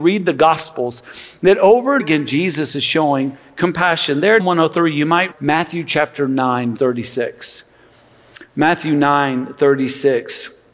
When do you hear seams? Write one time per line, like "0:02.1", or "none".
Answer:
0:02.0
0:04.4
0:05.3
0:06.8